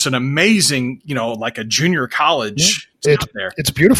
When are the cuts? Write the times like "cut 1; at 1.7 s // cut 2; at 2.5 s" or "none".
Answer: cut 1; at 3.0 s